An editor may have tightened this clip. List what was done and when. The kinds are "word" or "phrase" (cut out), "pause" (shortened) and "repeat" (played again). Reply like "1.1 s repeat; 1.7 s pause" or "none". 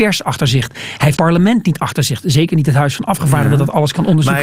1.2 s word